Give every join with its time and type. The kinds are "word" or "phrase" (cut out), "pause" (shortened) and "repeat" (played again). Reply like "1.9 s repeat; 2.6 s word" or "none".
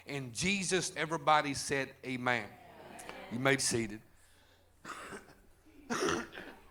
0.9 s word; 3.6 s word